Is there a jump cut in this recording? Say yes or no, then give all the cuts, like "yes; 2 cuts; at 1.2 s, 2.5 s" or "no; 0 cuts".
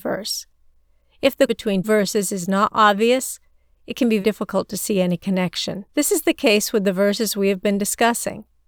yes; 4 cuts; at 1.5 s, 1.8 s, 4.2 s, 5.9 s